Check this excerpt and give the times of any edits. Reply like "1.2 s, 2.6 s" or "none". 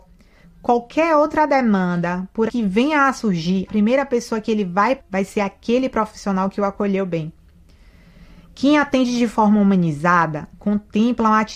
2.5 s, 3.7 s, 5.0 s